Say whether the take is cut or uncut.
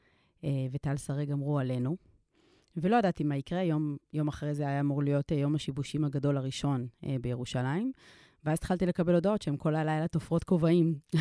uncut